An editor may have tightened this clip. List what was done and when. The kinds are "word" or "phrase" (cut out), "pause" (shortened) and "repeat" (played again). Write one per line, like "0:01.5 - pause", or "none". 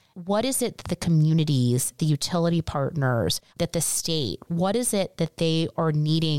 0:02.0 - word
0:03.5 - pause